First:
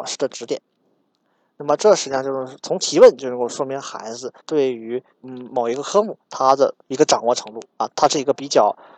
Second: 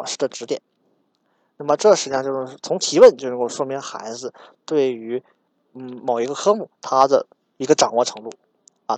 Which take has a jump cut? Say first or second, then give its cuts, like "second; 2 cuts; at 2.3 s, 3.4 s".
first; 4 cuts; at 4.4 s, 5.1 s, 6.8 s, 7.7 s